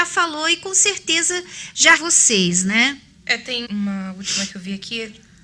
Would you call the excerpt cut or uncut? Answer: cut